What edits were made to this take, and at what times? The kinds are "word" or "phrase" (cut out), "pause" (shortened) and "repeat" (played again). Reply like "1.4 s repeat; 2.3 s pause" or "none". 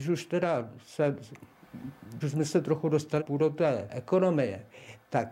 2.2 s word; 3.2 s word; 3.9 s word